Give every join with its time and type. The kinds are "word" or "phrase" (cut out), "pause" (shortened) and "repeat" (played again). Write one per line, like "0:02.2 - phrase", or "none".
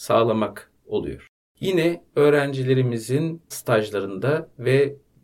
0:01.4 - pause
0:03.5 - word